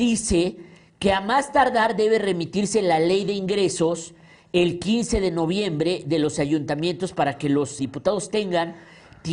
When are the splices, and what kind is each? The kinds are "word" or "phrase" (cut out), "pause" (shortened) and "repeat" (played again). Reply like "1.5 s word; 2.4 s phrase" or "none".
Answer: 7.8 s word